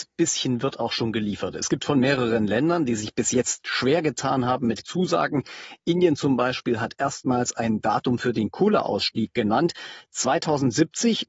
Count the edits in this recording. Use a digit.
1